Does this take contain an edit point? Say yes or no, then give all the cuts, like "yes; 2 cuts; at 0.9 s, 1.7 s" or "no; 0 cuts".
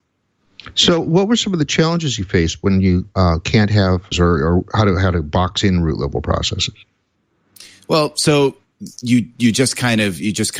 yes; 1 cut; at 4.1 s